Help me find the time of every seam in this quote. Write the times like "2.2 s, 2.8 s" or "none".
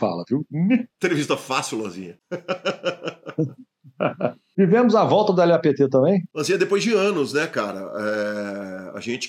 0.9 s